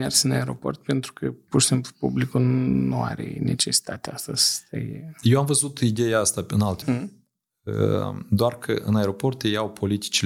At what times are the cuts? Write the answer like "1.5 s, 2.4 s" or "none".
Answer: 6.8 s